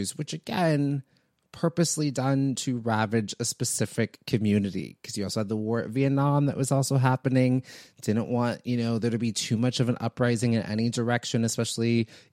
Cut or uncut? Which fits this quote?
uncut